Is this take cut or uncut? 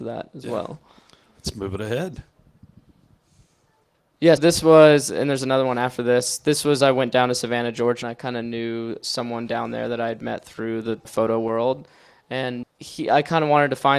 cut